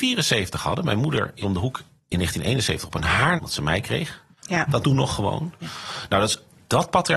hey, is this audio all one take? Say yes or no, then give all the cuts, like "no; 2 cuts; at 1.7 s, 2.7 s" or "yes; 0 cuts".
no; 5 cuts; at 1.4 s, 2.0 s, 3.4 s, 4.3 s, 4.8 s